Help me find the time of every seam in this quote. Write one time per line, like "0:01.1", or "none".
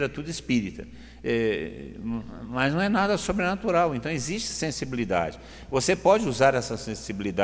none